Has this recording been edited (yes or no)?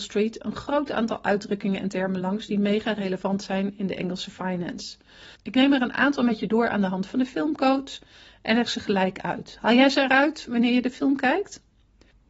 no